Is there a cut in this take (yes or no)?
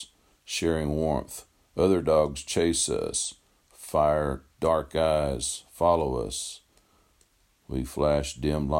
no